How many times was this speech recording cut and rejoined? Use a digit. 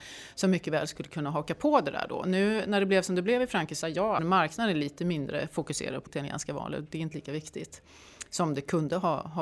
4